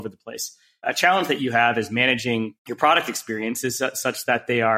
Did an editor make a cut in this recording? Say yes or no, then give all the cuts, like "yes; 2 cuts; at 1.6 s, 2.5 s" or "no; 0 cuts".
yes; 1 cut; at 2.6 s